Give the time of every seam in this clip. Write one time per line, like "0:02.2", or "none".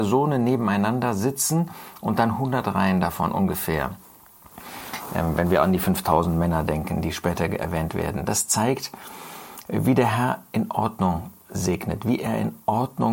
none